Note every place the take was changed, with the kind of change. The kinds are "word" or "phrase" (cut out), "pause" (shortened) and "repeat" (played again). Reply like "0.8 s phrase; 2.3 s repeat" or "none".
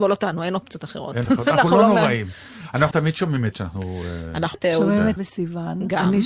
1.2 s word; 2.9 s word; 3.5 s word; 4.5 s word; 5.2 s word